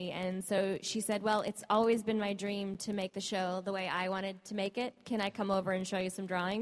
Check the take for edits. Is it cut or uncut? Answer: uncut